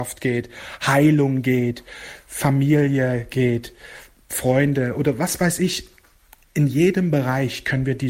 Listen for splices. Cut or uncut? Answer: uncut